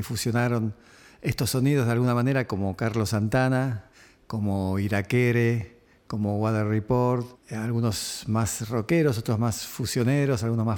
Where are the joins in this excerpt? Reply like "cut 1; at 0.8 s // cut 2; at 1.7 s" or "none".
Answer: cut 1; at 7.3 s